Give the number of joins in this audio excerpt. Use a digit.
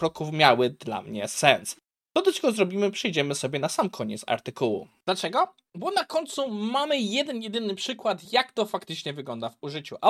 0